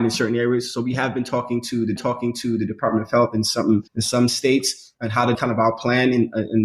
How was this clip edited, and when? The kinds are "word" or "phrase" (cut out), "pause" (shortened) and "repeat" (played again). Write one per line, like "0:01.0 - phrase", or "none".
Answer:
0:02.0 - repeat
0:03.9 - pause
0:05.3 - word